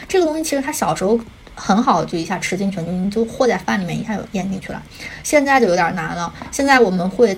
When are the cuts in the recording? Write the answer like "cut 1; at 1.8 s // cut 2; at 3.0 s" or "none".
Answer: none